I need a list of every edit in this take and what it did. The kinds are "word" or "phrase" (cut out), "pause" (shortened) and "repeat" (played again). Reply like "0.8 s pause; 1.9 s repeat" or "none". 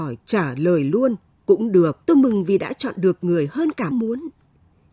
1.3 s pause; 2.0 s pause; 3.9 s word